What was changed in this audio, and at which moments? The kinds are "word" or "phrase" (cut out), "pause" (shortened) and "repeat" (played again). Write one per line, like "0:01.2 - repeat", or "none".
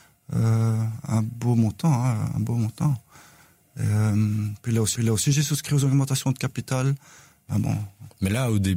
0:04.9 - repeat